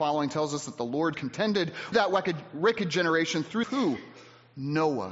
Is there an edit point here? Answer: yes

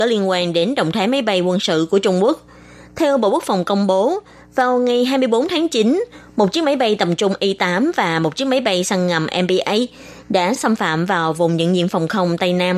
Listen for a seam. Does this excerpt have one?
no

